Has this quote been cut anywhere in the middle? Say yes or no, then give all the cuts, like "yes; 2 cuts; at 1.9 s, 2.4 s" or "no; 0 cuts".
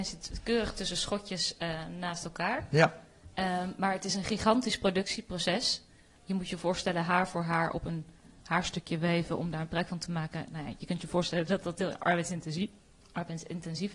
no; 0 cuts